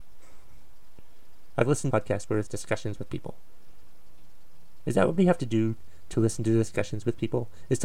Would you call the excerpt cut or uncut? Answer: cut